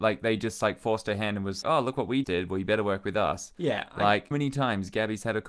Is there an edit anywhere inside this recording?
yes; 3 cuts; at 1.6 s, 2.2 s, 4.3 s

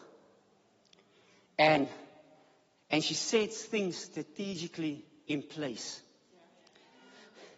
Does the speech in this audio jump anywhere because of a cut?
no; 0 cuts

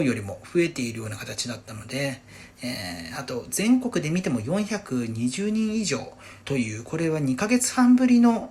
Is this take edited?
yes; 1 cut; at 6.4 s

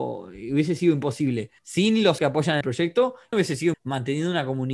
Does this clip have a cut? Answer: yes; 5 cuts; at 1.6 s, 2.2 s, 2.6 s, 3.3 s, 3.7 s

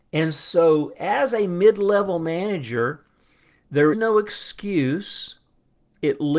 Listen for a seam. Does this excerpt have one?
yes; 1 cut; at 3.9 s

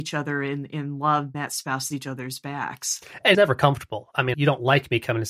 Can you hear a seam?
yes; 4 cuts; at 1.3 s, 1.9 s, 3.3 s, 4.3 s

